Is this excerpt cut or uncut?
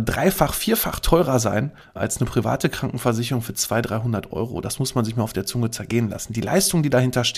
uncut